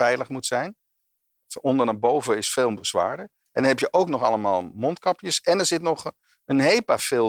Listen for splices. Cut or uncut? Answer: uncut